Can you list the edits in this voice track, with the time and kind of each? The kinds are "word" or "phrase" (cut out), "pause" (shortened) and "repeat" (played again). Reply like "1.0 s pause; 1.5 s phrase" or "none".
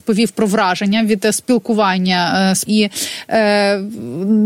1.3 s word; 2.7 s word